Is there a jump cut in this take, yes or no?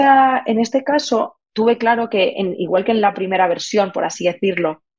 no